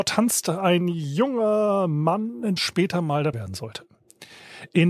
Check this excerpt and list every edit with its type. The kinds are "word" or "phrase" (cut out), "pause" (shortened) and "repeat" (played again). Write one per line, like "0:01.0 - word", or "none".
0:02.6 - word
0:03.3 - phrase